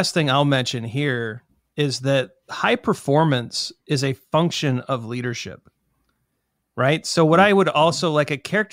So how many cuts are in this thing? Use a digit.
0